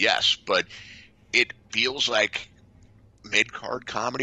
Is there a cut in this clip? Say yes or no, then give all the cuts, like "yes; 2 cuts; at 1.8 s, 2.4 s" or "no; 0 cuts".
no; 0 cuts